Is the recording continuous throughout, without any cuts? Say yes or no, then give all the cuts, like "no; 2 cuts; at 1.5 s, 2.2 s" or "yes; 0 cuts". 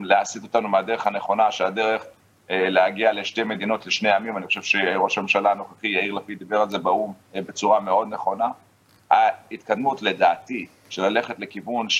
no; 1 cut; at 7.2 s